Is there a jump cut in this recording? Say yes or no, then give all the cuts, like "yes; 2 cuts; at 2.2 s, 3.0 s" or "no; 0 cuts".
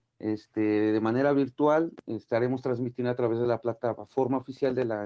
no; 0 cuts